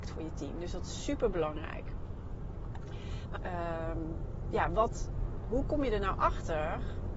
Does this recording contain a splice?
yes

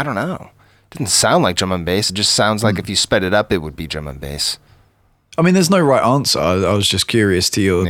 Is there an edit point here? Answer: no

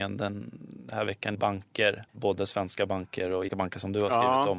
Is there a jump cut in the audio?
yes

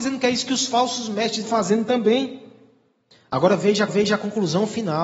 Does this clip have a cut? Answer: yes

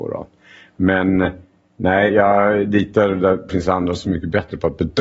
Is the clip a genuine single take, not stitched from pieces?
no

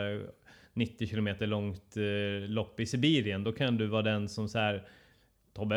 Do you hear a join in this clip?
no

